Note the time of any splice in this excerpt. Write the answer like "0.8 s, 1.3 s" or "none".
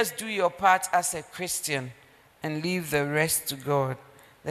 none